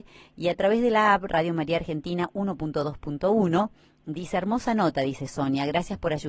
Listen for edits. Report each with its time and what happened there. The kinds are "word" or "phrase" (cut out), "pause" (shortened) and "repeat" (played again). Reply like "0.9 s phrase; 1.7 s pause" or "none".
none

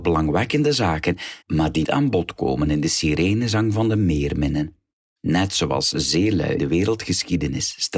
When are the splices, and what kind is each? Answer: 1.4 s pause; 1.8 s word; 4.9 s pause; 6.6 s word

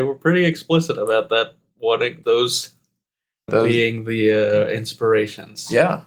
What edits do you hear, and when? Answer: 2.2 s word; 3.5 s word

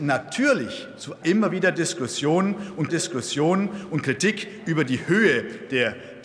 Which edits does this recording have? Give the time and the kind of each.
1.2 s phrase; 2.9 s repeat

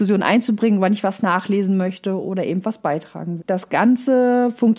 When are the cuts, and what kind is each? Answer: 3.4 s word

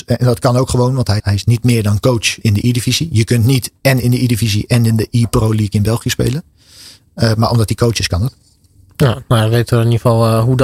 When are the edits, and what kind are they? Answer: 1.2 s word; 2.4 s word

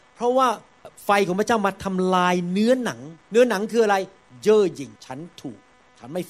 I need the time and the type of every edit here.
3.2 s pause; 5.0 s pause

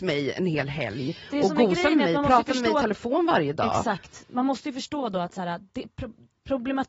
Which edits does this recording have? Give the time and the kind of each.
none

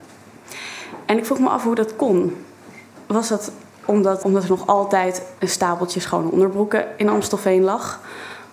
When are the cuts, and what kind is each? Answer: 4.2 s word

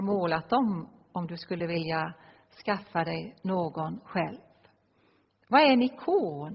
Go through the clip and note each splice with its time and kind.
none

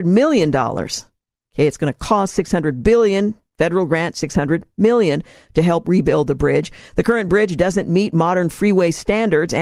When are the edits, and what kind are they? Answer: none

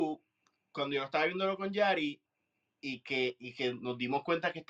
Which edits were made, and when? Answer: none

